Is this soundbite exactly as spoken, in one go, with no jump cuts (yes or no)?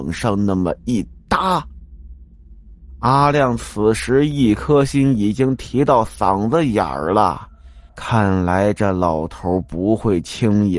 no